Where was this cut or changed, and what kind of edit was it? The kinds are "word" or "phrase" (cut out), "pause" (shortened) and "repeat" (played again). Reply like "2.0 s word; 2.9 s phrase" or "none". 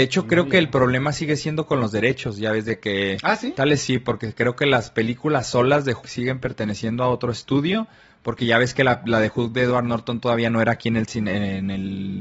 6.0 s word